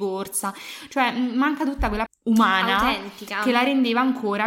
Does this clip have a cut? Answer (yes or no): yes